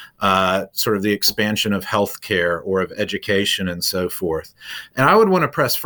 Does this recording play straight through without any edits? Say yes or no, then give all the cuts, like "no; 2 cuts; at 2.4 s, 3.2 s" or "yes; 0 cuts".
yes; 0 cuts